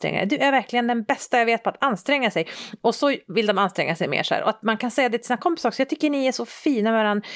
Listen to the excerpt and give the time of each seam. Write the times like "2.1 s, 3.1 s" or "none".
none

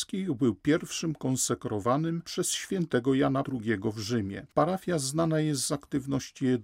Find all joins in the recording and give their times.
3.4 s, 4.5 s

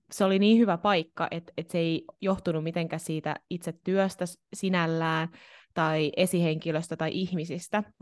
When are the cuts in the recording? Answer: none

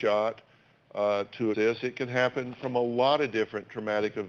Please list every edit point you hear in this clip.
1.5 s

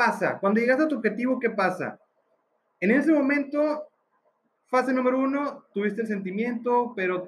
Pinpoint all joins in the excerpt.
none

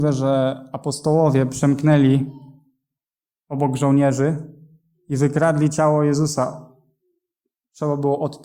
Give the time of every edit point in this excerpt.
none

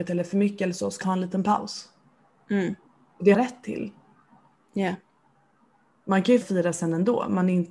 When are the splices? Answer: 1.0 s, 3.3 s, 6.4 s

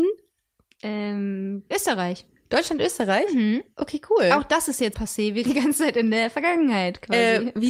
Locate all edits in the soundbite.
1.7 s, 4.9 s, 5.5 s

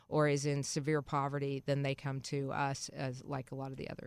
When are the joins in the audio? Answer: 2.0 s

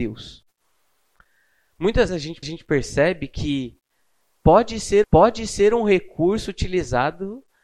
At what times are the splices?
2.1 s, 2.4 s, 5.0 s

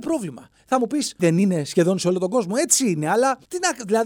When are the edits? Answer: 1.2 s

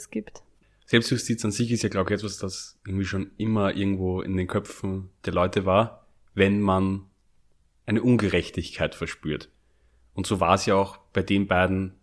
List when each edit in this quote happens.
none

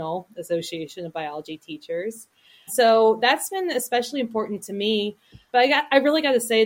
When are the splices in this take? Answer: 2.7 s, 5.5 s

